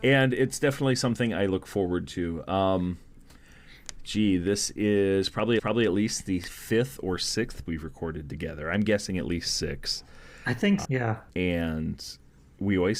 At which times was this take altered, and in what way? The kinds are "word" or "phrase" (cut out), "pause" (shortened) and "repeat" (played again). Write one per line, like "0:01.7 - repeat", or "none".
0:05.6 - repeat
0:07.7 - word
0:10.8 - word
0:11.3 - pause